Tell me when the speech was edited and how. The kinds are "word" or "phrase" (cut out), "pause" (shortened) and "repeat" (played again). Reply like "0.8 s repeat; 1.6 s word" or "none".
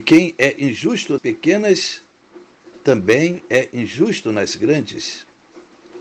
1.2 s word